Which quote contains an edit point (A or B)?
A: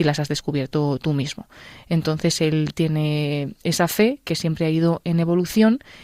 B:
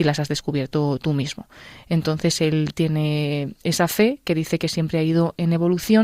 A